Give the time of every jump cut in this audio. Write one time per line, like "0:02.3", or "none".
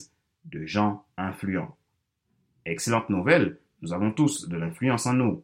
none